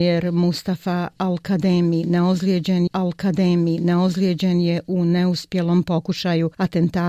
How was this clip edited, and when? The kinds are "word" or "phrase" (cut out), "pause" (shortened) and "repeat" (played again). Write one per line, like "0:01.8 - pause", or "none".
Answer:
0:02.9 - repeat